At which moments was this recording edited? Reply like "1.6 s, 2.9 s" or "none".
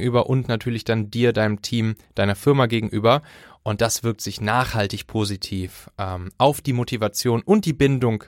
none